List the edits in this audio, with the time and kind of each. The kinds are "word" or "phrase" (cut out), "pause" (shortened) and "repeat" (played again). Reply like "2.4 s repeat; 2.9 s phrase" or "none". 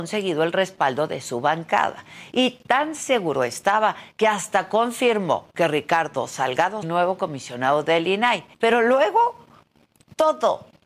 6.8 s phrase; 8.5 s pause